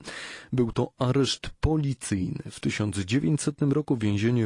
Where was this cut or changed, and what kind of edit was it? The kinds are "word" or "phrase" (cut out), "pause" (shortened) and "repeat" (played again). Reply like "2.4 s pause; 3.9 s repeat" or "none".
none